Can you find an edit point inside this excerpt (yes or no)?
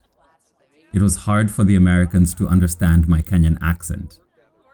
no